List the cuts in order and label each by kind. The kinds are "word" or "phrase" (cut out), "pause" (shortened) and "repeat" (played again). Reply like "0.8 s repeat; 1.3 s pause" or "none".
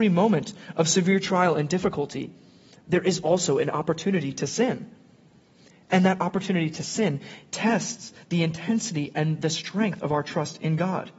none